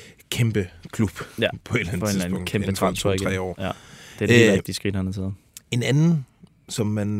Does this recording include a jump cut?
no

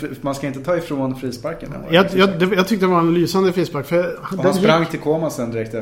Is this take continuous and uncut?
yes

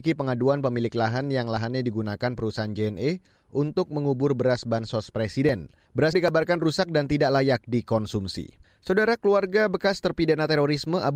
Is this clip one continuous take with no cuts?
no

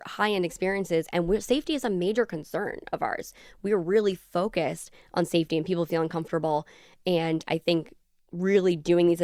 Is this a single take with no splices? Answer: yes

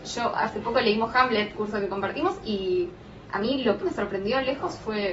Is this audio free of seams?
no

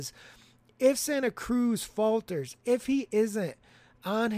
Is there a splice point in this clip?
no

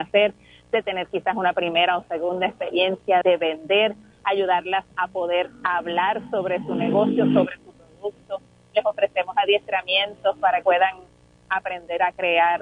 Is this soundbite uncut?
no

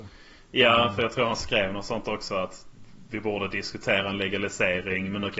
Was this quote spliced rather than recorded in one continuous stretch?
no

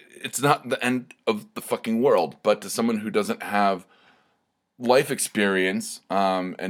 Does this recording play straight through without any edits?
yes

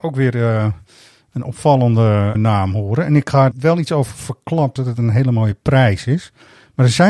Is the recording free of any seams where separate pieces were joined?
no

